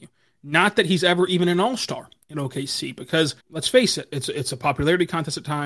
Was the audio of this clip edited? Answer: yes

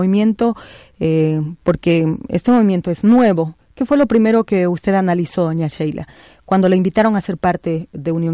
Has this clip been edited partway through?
no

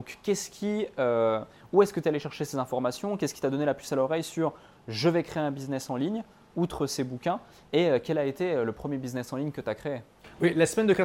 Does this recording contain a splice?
no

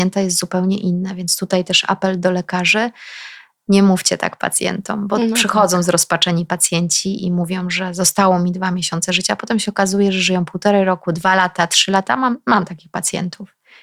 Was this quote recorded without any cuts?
yes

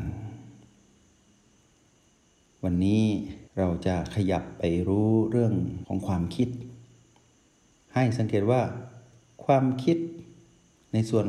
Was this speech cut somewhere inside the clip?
no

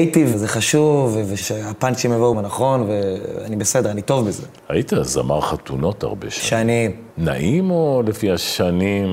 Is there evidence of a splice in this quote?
yes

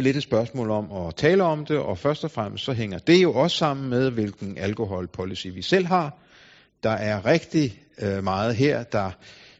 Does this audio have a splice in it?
no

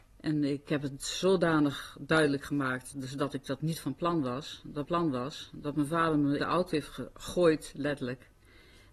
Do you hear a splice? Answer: yes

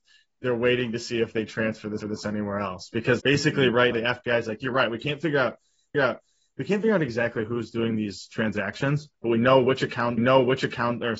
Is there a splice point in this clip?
yes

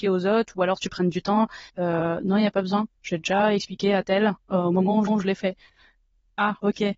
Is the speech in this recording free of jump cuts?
no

